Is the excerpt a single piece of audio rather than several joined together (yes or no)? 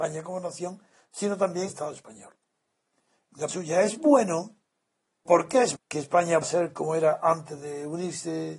no